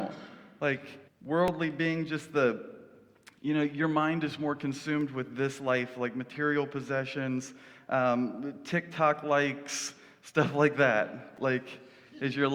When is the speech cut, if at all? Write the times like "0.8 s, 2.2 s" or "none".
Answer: 1.1 s